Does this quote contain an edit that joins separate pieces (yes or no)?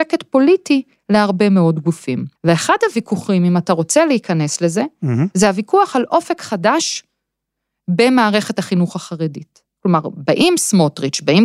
yes